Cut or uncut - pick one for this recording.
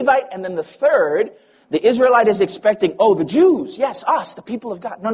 uncut